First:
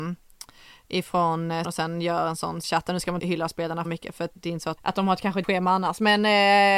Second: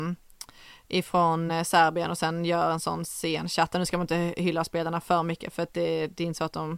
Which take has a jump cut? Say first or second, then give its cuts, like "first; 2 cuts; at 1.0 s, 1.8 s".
first; 7 cuts; at 1.6 s, 2.6 s, 3.2 s, 3.8 s, 4.3 s, 4.8 s, 5.4 s